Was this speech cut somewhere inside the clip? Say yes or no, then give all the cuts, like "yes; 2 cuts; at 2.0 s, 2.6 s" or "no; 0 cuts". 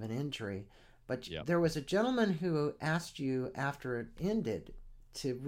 no; 0 cuts